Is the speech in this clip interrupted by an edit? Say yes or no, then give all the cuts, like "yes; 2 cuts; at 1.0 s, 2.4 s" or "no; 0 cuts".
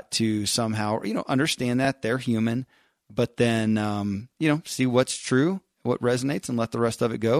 no; 0 cuts